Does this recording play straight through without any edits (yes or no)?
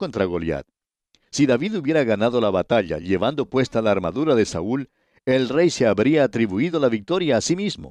yes